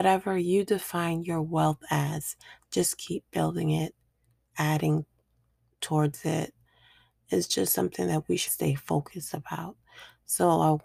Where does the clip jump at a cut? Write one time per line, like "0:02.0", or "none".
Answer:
0:08.5